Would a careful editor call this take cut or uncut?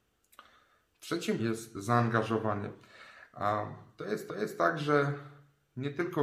cut